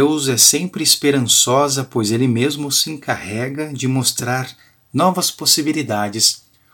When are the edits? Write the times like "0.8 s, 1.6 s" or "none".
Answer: none